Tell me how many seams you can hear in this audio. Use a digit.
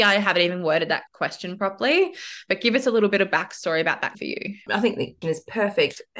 3